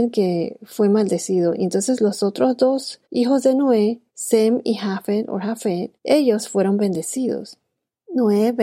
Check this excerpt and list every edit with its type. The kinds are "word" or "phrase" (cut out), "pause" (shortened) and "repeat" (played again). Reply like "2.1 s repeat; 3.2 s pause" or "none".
3.0 s pause; 4.1 s pause; 6.0 s pause